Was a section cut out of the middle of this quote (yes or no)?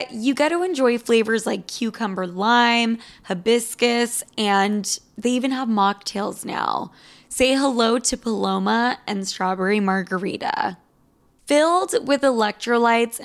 no